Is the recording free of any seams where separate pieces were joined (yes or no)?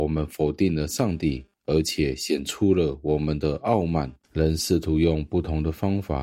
no